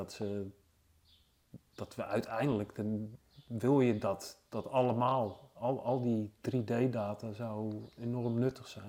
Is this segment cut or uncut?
uncut